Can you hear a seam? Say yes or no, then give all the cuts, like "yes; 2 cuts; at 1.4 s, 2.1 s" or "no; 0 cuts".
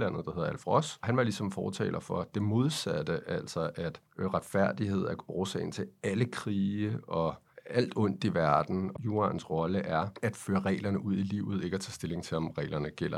no; 0 cuts